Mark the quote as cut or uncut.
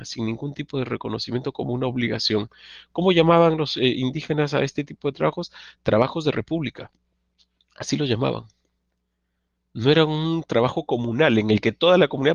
uncut